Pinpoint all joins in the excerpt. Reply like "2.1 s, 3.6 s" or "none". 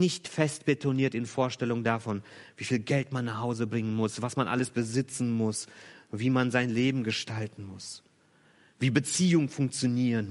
none